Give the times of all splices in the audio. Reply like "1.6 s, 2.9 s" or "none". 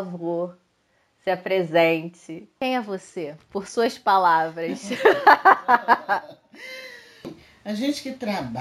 none